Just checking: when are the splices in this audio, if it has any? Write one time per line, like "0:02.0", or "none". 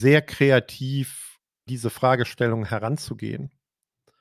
0:01.7